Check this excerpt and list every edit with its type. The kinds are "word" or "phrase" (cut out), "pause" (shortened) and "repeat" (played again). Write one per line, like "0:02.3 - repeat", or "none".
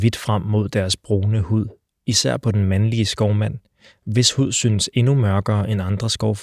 none